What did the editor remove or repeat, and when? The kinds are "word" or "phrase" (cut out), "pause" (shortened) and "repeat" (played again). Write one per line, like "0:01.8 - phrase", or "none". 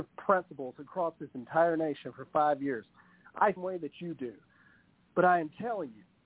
0:03.6 - phrase